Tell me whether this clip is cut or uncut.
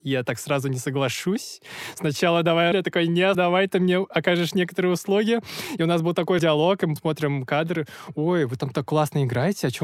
cut